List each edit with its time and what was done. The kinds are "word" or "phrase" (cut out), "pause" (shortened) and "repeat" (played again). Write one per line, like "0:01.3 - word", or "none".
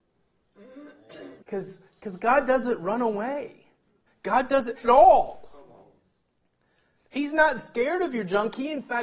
0:01.4 - pause
0:04.1 - pause
0:04.8 - phrase